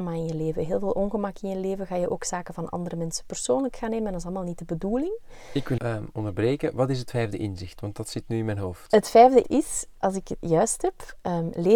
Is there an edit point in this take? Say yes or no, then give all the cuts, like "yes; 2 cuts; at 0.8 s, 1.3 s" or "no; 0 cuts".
yes; 2 cuts; at 5.8 s, 9.4 s